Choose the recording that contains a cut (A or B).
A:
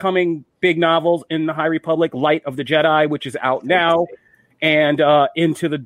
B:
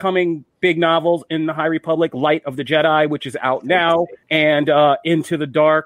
B